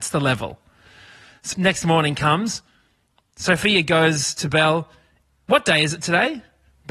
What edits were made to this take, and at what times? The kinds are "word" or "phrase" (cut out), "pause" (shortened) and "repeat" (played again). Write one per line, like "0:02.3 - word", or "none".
0:01.5 - word